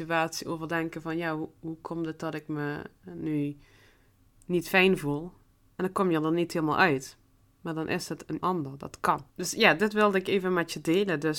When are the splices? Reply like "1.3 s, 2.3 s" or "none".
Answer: 8.4 s, 9.3 s